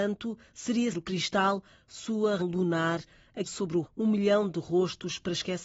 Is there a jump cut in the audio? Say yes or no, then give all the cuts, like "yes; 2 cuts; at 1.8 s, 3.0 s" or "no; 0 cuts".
yes; 4 cuts; at 0.9 s, 2.4 s, 3.4 s, 3.8 s